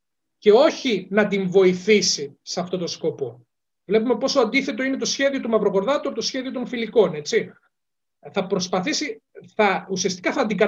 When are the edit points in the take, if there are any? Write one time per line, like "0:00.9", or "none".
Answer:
none

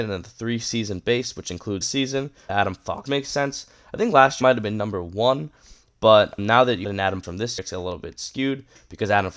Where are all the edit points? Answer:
0:01.8
0:02.5
0:03.1
0:04.4
0:06.4
0:06.8
0:07.2
0:07.6

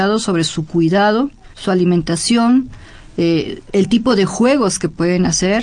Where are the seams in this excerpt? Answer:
0:01.5
0:03.7

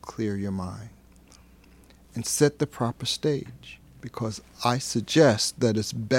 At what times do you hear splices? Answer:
none

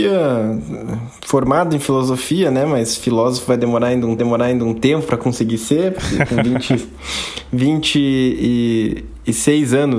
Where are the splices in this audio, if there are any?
0:04.2

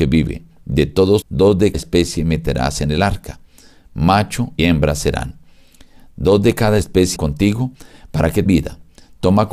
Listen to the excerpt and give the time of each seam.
0:01.2
0:01.7
0:04.6
0:07.2
0:08.5

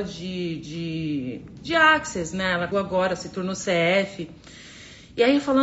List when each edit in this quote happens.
0:02.7

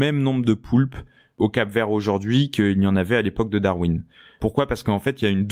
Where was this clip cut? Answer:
none

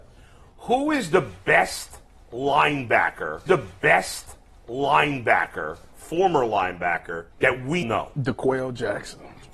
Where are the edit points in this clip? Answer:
0:03.5
0:07.3
0:07.8

